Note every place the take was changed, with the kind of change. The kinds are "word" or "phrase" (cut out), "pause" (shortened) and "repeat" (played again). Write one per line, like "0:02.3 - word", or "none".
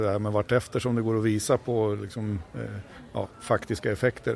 none